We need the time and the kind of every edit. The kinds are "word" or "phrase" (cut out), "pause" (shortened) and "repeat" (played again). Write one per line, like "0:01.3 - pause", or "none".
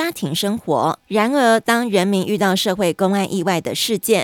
0:01.0 - pause